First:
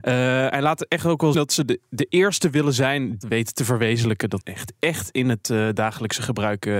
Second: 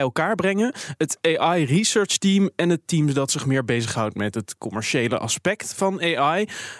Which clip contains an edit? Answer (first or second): first